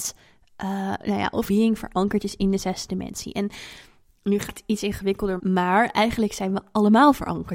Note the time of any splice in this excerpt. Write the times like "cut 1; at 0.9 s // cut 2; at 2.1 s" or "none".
cut 1; at 1.5 s // cut 2; at 4.5 s // cut 3; at 5.4 s